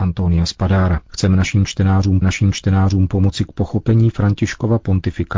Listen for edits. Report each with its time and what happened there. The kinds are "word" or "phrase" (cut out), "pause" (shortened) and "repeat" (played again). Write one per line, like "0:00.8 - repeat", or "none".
0:01.0 - pause
0:02.2 - repeat